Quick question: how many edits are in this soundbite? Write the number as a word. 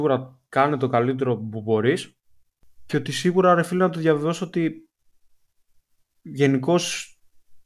zero